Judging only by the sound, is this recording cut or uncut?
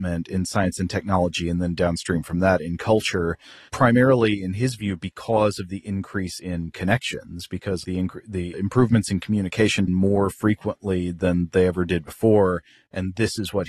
cut